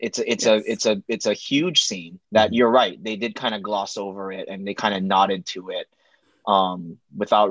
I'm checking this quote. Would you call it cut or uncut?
cut